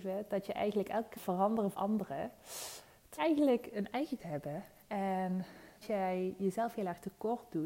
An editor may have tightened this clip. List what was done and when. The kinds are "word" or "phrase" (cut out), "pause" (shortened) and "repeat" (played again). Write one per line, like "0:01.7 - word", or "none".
0:01.2 - word
0:01.7 - word
0:03.2 - word
0:04.2 - word
0:05.8 - word